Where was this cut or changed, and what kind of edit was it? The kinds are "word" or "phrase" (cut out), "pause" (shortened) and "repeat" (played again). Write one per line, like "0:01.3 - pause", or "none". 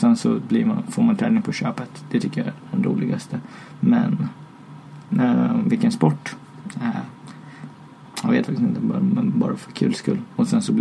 none